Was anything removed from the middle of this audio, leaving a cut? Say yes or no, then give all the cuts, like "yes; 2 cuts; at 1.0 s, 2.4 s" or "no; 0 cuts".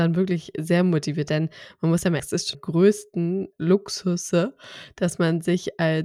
yes; 4 cuts; at 1.3 s, 2.2 s, 2.5 s, 3.5 s